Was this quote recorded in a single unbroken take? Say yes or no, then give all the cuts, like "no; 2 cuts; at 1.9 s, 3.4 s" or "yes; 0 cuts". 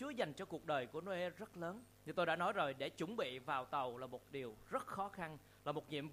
no; 1 cut; at 1.9 s